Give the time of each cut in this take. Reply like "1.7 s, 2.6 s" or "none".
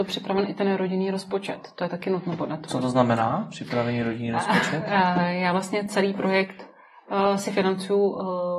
none